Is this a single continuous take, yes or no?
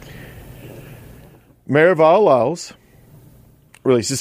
yes